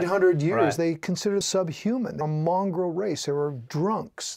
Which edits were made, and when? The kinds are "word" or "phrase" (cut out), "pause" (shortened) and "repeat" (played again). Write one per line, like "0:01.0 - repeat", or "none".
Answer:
0:01.4 - word
0:02.2 - word